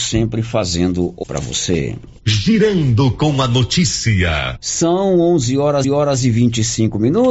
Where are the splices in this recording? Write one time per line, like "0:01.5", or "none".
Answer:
0:01.2
0:02.2
0:05.8